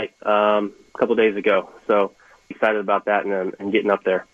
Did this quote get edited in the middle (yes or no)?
yes